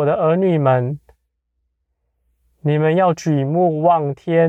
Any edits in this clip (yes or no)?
no